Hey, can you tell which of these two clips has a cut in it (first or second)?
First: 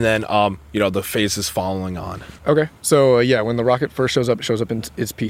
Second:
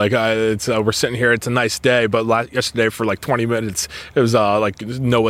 first